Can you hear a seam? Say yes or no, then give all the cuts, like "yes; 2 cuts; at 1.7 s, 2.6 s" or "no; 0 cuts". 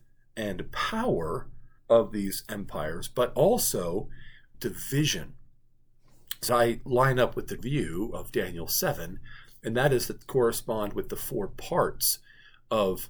yes; 5 cuts; at 1.8 s, 4.5 s, 6.5 s, 7.6 s, 10.2 s